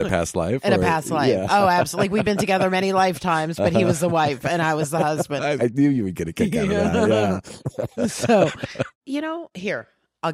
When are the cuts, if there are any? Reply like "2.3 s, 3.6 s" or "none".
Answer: 5.6 s, 8.9 s

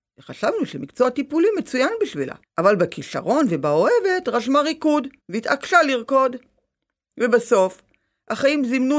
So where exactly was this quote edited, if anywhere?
2.4 s, 5.2 s

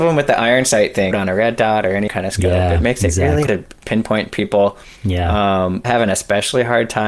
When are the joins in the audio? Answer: 1.1 s, 2.1 s, 3.5 s, 3.8 s, 5.0 s, 5.8 s

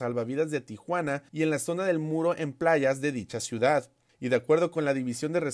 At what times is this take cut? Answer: 1.3 s, 4.1 s

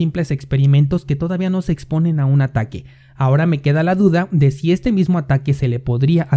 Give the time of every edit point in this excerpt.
none

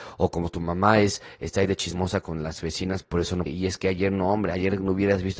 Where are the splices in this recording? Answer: 2.2 s, 3.0 s, 3.5 s

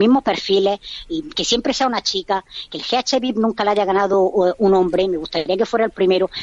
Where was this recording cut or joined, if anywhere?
none

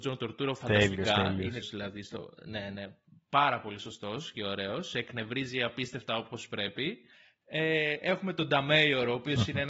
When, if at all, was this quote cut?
1.6 s

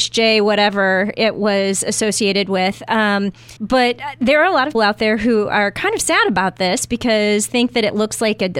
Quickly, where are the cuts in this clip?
3.6 s, 4.7 s, 7.5 s

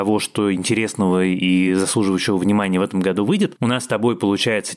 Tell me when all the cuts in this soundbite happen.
none

